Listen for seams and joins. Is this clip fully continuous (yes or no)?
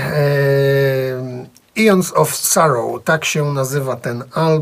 yes